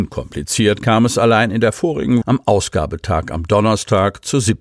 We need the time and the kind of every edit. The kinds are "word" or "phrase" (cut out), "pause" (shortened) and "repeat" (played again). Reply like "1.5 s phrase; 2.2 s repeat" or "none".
2.2 s word

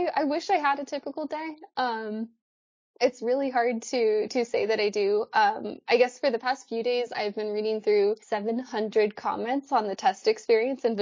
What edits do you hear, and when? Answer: 8.2 s pause

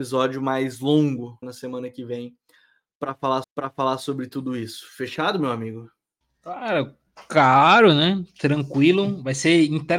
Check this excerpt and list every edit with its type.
1.4 s word; 3.4 s repeat; 6.2 s pause

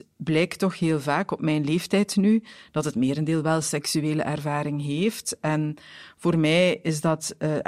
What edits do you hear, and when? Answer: none

